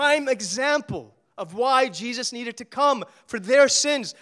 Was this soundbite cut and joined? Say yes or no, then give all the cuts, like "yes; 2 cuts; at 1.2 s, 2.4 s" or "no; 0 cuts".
no; 0 cuts